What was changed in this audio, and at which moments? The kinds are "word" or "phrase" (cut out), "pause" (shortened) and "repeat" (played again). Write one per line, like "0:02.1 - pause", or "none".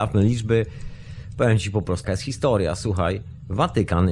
0:02.0 - word